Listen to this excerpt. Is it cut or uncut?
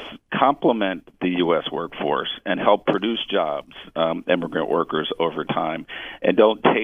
uncut